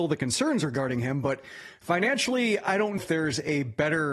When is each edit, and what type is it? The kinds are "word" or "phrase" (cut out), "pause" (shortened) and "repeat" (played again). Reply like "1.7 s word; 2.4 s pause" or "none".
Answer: 3.0 s word